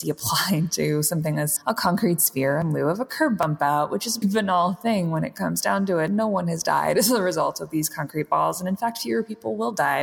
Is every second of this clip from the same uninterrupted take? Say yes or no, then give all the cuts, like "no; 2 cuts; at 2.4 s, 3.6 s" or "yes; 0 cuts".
no; 2 cuts; at 1.6 s, 4.2 s